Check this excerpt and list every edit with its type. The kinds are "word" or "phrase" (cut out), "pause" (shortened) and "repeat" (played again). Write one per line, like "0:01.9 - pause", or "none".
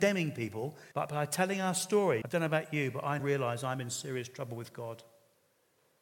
0:00.9 - pause
0:02.2 - phrase
0:03.2 - word